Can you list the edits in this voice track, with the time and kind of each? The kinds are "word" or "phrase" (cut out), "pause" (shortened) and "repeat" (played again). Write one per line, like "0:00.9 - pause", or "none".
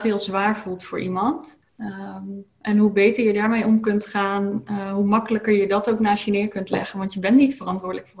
0:01.7 - pause